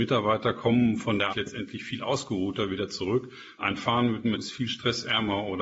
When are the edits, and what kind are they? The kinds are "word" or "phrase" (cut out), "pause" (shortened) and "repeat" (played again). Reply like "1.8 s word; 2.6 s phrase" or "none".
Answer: 1.3 s word; 3.6 s word; 4.3 s word

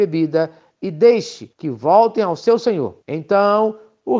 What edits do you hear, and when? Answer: 1.5 s pause; 3.0 s pause

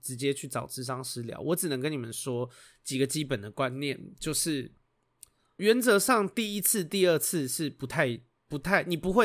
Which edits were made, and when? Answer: 5.6 s word

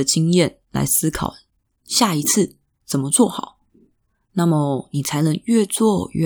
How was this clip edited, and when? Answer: none

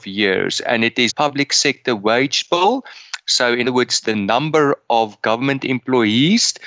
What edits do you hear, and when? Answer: 1.1 s phrase; 3.6 s word; 4.0 s word

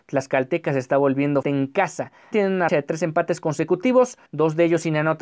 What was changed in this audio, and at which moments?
1.4 s word; 2.3 s word; 2.7 s word; 4.3 s pause

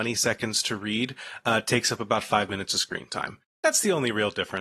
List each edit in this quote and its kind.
none

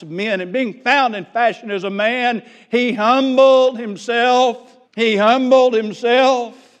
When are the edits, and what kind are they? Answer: 4.8 s pause

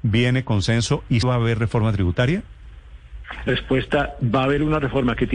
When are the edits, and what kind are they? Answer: 1.2 s word; 3.5 s word

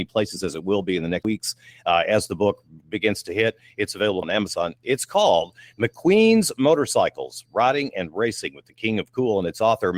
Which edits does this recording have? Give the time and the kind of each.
1.2 s word; 2.8 s word; 4.2 s word

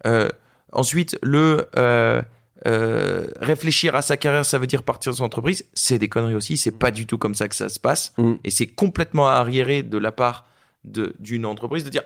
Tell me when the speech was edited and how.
none

